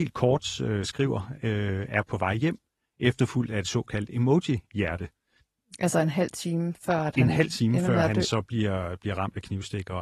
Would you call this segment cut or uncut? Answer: uncut